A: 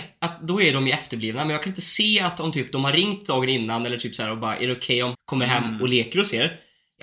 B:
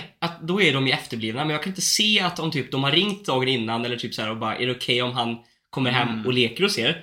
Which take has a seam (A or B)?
A